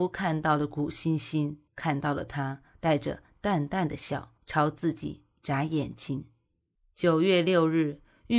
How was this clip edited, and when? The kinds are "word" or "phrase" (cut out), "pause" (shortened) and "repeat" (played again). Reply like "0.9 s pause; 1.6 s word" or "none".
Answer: 1.7 s pause; 4.4 s pause; 6.8 s pause